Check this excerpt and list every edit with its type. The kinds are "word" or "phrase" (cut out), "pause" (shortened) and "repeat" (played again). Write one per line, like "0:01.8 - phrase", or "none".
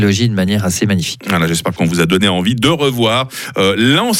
none